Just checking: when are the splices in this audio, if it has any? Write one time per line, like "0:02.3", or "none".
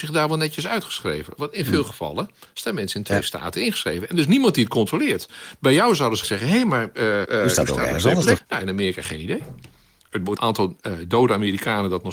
0:06.2
0:07.2
0:08.4
0:10.4